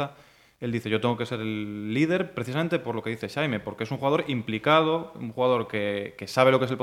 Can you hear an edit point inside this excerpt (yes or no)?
no